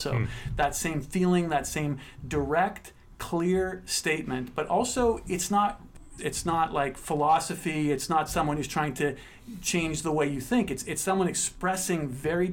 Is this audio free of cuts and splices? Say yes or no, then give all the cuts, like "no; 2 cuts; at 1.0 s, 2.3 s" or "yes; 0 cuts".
no; 1 cut; at 6.2 s